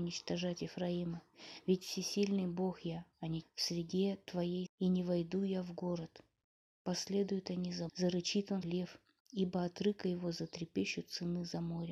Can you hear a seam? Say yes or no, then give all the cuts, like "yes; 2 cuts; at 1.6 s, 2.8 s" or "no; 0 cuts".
yes; 4 cuts; at 3.4 s, 4.7 s, 7.9 s, 8.6 s